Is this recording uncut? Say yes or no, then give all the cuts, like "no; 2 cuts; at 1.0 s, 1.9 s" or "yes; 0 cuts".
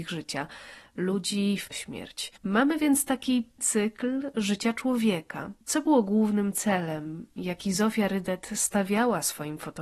no; 4 cuts; at 1.7 s, 2.4 s, 3.6 s, 5.6 s